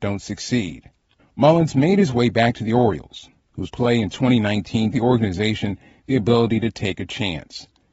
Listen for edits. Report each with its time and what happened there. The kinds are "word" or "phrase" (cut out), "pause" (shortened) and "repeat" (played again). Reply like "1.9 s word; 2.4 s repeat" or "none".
1.2 s pause; 3.7 s word; 4.9 s word